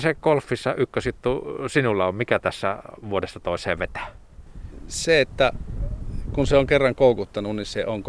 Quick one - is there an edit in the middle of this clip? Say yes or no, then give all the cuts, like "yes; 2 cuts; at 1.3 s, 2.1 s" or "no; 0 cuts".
no; 0 cuts